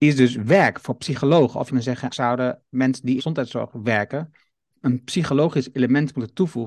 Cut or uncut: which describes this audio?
cut